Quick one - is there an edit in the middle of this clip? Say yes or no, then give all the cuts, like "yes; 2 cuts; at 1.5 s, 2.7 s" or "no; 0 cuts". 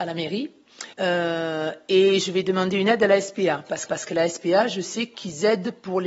yes; 2 cuts; at 0.9 s, 3.8 s